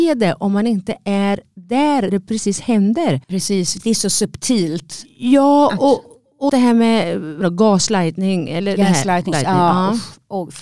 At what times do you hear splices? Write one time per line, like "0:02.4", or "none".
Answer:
0:02.1
0:03.2
0:06.5
0:07.4
0:09.3